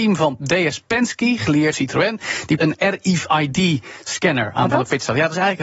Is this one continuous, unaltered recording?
no; 3 cuts; at 1.7 s, 2.6 s, 4.7 s

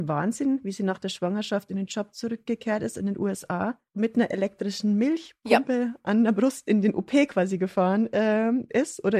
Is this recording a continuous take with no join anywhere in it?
no; 1 cut; at 3.9 s

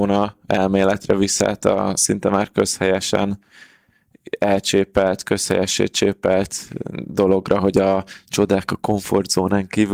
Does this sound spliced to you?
no; 0 cuts

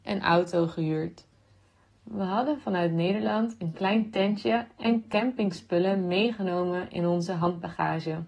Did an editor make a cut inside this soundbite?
no; 0 cuts

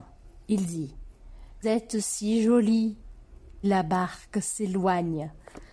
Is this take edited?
yes; 2 cuts; at 1.6 s, 3.6 s

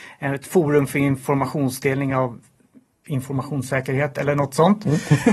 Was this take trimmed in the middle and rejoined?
no; 0 cuts

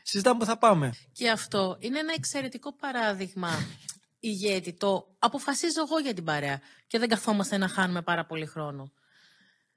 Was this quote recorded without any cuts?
yes; 0 cuts

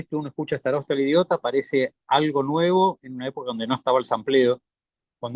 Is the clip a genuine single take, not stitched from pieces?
no; 1 cut; at 2.0 s

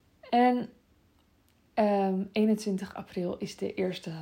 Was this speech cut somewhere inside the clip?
no; 0 cuts

